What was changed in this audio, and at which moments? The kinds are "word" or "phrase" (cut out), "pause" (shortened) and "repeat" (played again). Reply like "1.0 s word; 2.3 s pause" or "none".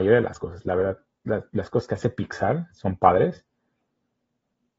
none